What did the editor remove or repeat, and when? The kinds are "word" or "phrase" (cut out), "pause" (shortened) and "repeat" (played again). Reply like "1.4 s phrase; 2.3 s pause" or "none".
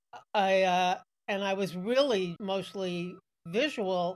2.4 s word

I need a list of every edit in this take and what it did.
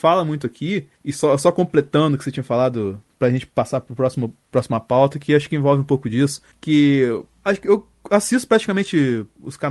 none

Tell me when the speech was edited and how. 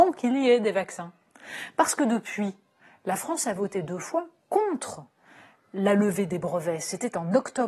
none

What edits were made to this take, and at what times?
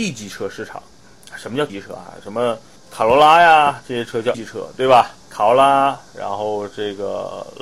1.7 s word; 2.8 s pause; 4.3 s word; 5.2 s pause

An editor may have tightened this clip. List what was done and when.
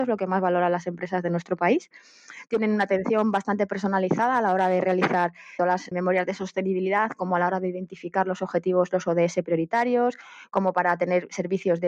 5.6 s word; 5.9 s word

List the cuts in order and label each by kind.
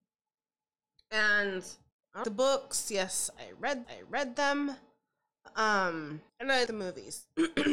1.9 s pause; 2.2 s phrase; 3.8 s repeat; 6.3 s pause; 6.7 s word

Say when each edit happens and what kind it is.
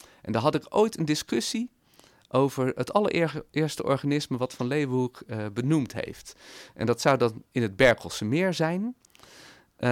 none

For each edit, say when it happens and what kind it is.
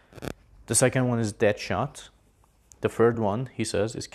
none

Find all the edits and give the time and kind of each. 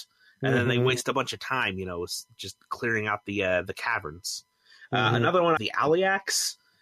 5.6 s phrase

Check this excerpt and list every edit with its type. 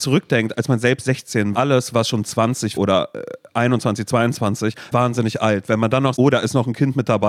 1.5 s phrase; 2.8 s word; 4.9 s word; 6.2 s word

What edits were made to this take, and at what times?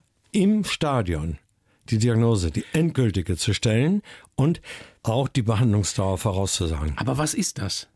none

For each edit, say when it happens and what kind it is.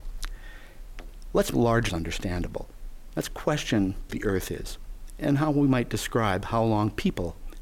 1.5 s word; 1.9 s word; 4.1 s phrase

